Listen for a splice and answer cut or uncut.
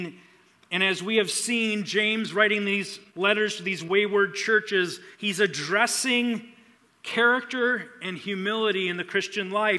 cut